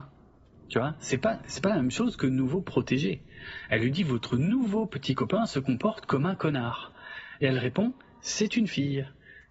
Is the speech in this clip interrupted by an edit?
no; 0 cuts

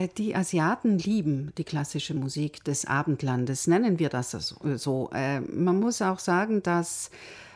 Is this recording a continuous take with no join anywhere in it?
yes; 0 cuts

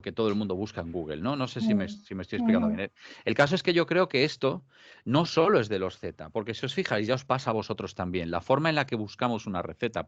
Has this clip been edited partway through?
no; 0 cuts

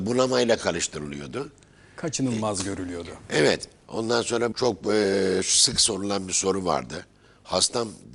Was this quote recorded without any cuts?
no; 1 cut; at 4.5 s

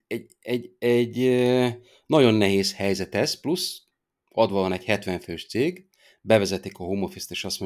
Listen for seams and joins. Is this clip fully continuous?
yes; 0 cuts

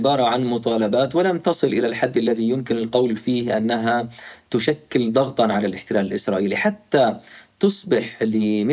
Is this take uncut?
yes; 0 cuts

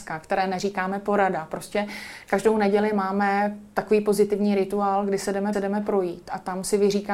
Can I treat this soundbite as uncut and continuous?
no; 1 cut; at 5.5 s

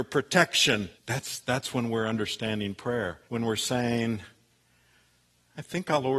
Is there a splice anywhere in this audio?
yes; 2 cuts; at 1.0 s, 3.2 s

